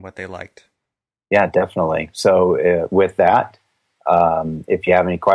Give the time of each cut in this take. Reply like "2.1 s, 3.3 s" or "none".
none